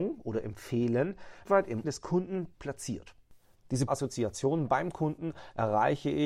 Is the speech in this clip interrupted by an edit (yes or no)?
yes